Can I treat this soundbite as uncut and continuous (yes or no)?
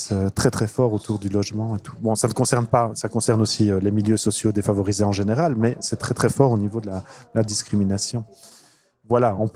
yes